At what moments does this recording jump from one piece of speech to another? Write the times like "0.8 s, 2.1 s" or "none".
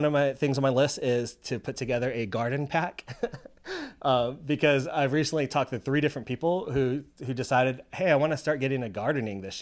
7.1 s